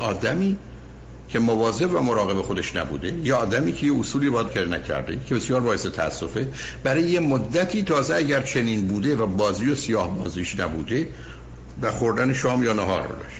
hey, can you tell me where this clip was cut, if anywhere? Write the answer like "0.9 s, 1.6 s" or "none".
4.5 s, 11.8 s